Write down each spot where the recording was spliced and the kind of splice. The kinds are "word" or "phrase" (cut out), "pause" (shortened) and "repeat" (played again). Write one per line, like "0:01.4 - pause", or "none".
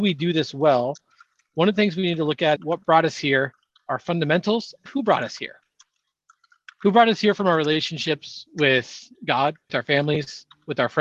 0:02.6 - word
0:04.9 - word
0:09.7 - word